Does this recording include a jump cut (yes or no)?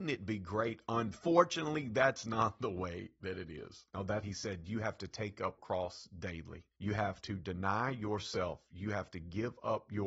yes